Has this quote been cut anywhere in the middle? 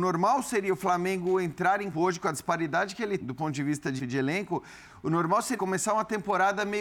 yes; 4 cuts; at 1.9 s, 3.2 s, 4.0 s, 5.6 s

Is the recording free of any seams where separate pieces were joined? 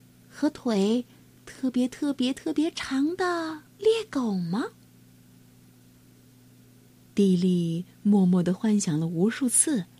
no; 1 cut; at 3.7 s

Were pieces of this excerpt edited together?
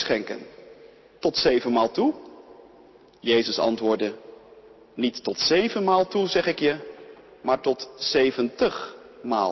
no; 0 cuts

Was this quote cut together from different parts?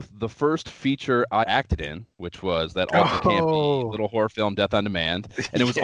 yes; 2 cuts; at 1.4 s, 2.1 s

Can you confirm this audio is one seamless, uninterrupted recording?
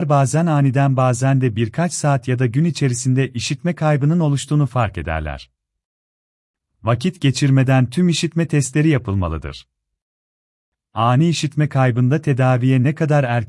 yes; 0 cuts

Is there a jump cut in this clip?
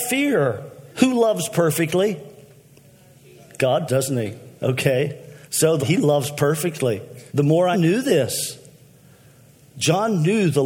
yes; 6 cuts; at 0.9 s, 3.9 s, 5.4 s, 5.8 s, 7.3 s, 7.7 s

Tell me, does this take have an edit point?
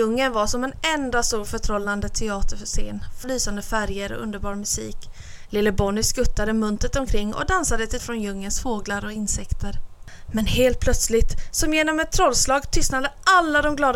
yes; 2 cuts; at 3.2 s, 8.0 s

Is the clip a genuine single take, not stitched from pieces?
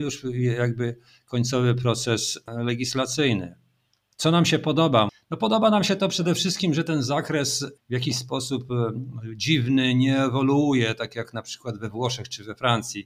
yes; 0 cuts

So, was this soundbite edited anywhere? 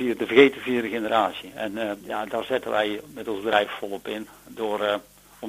yes; 1 cut; at 2.0 s

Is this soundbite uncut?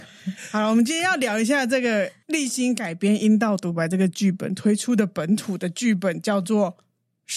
yes; 0 cuts

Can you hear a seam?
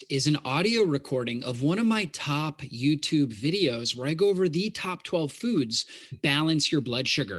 yes; 1 cut; at 6.1 s

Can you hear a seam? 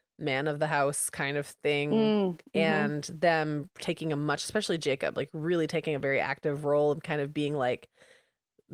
no; 0 cuts

